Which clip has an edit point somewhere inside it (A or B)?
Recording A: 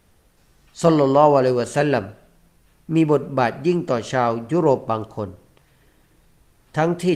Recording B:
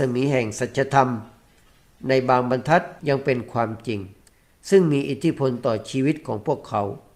B